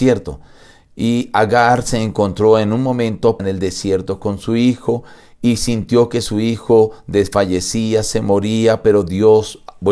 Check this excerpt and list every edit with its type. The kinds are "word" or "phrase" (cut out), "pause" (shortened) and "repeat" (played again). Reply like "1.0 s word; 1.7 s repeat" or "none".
3.4 s word